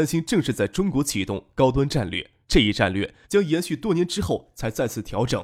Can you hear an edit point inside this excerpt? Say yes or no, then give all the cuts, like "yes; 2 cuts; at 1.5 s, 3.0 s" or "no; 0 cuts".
yes; 2 cuts; at 2.4 s, 3.2 s